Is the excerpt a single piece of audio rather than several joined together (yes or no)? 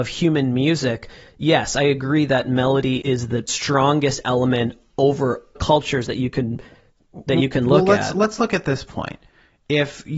no